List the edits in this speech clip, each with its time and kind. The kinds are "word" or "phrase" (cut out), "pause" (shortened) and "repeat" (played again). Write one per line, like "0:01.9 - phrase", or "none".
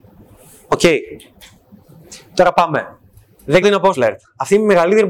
0:03.6 - word
0:03.9 - word